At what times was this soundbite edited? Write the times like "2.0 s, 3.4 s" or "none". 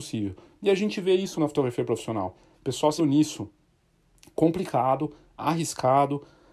1.3 s, 3.0 s